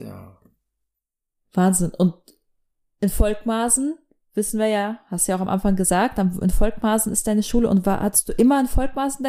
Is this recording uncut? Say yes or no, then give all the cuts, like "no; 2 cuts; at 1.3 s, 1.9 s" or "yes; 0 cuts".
yes; 0 cuts